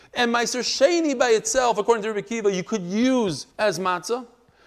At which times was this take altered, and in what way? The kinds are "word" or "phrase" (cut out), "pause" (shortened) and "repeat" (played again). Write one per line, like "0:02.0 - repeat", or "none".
0:03.5 - pause